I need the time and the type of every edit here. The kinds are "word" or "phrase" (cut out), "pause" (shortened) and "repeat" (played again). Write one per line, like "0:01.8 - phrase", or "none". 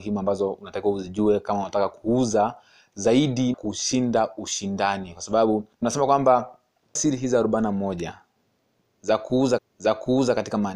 0:03.5 - word
0:05.7 - pause
0:07.0 - word
0:09.6 - repeat